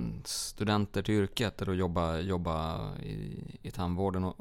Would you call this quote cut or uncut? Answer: uncut